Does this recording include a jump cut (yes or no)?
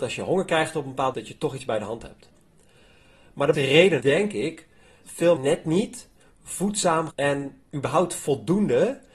yes